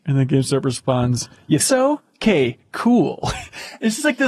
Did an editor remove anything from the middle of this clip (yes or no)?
yes